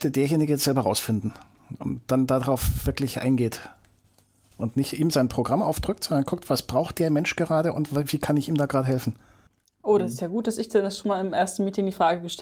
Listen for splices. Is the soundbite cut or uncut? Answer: uncut